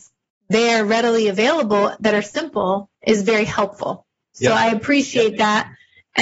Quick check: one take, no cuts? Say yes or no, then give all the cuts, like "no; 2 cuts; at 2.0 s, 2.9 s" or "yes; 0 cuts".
no; 1 cut; at 2.9 s